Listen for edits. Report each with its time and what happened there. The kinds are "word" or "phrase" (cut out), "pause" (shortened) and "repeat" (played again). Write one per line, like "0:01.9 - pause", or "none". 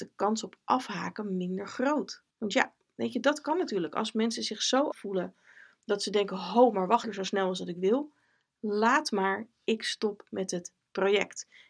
0:02.3 - pause
0:04.9 - word
0:07.0 - phrase